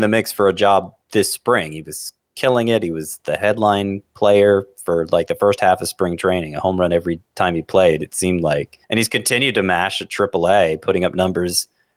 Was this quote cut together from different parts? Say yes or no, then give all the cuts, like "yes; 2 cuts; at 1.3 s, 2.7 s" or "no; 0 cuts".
yes; 2 cuts; at 1.0 s, 8.8 s